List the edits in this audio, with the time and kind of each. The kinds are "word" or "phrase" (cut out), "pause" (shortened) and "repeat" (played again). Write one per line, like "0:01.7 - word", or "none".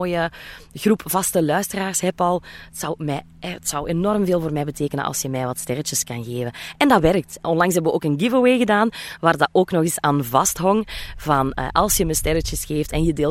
none